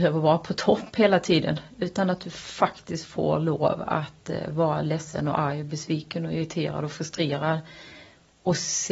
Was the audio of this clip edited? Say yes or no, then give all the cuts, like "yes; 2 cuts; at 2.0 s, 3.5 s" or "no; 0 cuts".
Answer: no; 0 cuts